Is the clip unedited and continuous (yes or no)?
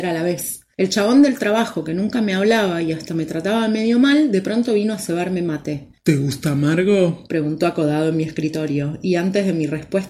yes